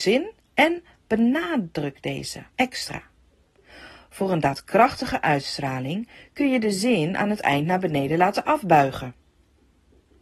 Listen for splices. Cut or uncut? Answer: cut